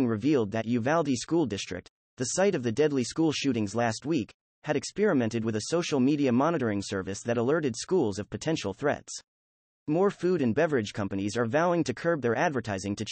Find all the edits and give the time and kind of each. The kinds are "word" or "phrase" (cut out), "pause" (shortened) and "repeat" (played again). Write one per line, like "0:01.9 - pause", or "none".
none